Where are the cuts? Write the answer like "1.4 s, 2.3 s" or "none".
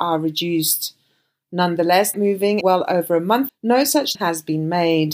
2.1 s, 2.6 s, 3.5 s, 4.1 s